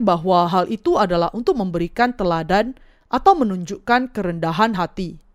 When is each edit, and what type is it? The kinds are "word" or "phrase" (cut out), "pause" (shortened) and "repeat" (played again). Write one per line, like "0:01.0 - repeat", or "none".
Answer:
none

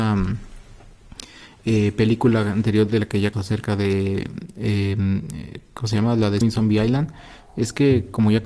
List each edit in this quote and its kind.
0:03.3 - word
0:06.4 - word

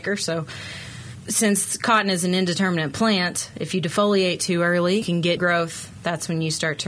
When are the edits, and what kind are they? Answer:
0:05.0 - word
0:05.4 - word

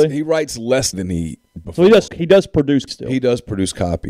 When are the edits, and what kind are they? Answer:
0:00.9 - word
0:01.6 - word
0:02.1 - word
0:02.9 - word

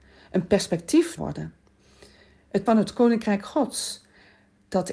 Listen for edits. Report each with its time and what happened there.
0:01.2 - phrase
0:02.7 - word

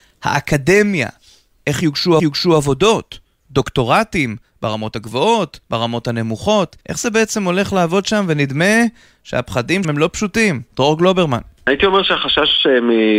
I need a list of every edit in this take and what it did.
0:02.2 - repeat
0:05.6 - pause
0:06.8 - pause
0:09.8 - word
0:10.7 - pause

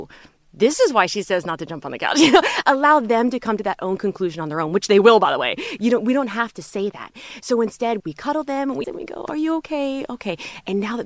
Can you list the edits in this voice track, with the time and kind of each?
0:08.0 - word
0:08.8 - word

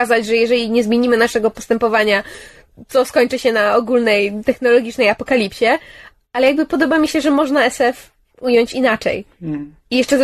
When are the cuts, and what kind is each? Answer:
none

